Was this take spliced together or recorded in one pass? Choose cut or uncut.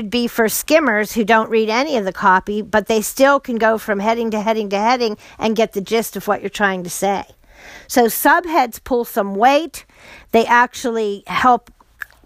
uncut